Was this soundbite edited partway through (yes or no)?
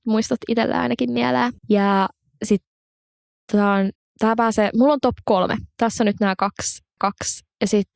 yes